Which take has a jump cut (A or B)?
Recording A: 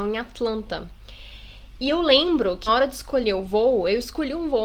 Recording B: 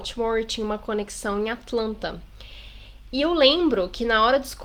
A